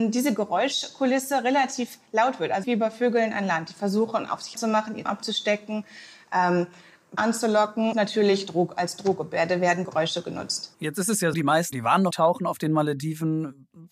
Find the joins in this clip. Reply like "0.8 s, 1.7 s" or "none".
2.6 s, 4.5 s, 5.0 s, 7.2 s, 7.9 s, 9.8 s, 11.3 s, 11.7 s, 12.1 s